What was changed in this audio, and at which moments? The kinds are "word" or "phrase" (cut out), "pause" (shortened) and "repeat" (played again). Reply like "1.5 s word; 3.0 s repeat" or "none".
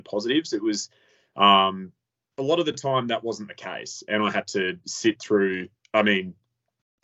none